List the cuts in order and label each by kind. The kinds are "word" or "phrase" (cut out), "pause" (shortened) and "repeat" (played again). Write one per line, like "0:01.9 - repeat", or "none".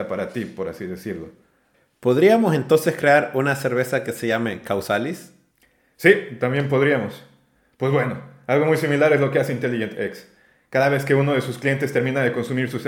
none